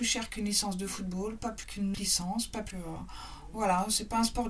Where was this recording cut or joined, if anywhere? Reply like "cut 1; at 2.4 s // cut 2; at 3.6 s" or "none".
cut 1; at 1.6 s // cut 2; at 1.9 s // cut 3; at 2.7 s